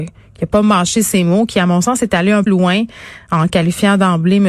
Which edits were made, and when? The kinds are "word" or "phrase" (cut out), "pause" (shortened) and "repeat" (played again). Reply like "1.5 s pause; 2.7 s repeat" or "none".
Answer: 2.5 s word